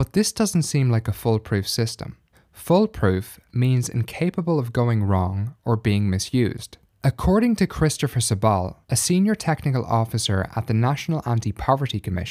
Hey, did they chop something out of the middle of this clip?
yes; 3 cuts; at 2.3 s, 6.9 s, 8.8 s

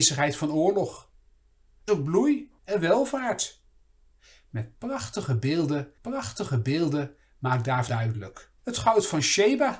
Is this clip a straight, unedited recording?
no; 5 cuts; at 1.9 s, 2.6 s, 6.0 s, 7.9 s, 8.6 s

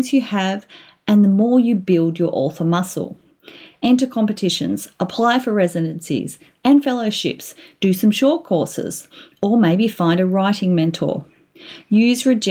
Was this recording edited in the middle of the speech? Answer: no; 0 cuts

